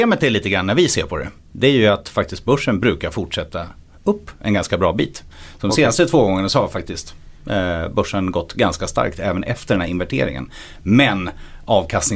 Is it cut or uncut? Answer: uncut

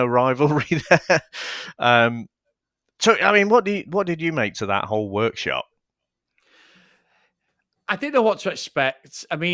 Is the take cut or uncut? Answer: uncut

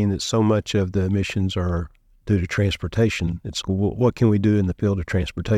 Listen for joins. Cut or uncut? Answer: cut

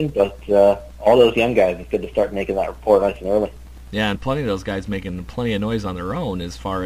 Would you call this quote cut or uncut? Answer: cut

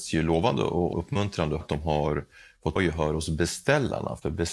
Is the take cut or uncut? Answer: cut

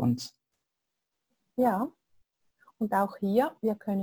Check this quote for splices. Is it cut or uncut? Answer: uncut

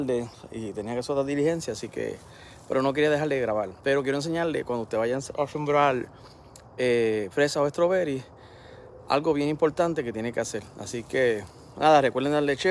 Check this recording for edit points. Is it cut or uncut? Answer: cut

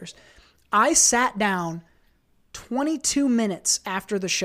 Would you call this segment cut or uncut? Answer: uncut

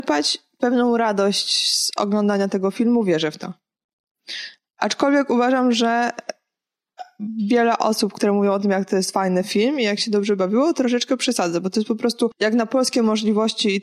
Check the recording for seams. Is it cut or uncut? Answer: uncut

